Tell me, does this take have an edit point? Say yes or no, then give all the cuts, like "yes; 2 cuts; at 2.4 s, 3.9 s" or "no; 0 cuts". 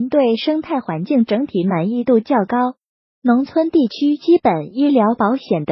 no; 0 cuts